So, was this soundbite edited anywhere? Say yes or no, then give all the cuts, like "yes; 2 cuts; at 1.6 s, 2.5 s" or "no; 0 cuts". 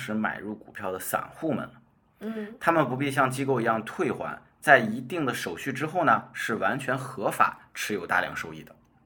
no; 0 cuts